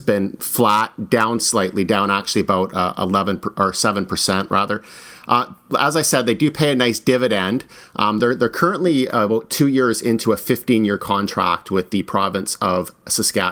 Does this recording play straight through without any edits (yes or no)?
yes